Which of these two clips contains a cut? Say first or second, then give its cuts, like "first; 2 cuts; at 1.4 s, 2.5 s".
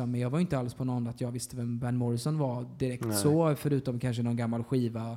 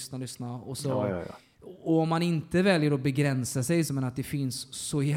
second; 1 cut; at 3.9 s